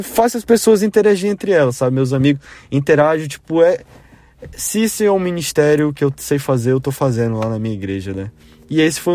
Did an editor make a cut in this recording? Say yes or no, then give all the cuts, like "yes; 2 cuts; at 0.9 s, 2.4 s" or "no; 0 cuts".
no; 0 cuts